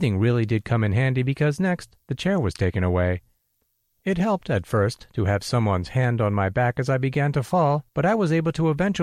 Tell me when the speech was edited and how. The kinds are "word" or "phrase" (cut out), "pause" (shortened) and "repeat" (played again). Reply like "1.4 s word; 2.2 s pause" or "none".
7.9 s pause